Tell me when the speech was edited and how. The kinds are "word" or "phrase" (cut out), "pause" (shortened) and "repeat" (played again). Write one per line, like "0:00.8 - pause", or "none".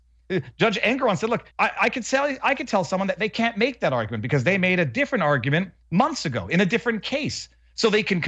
0:01.5 - pause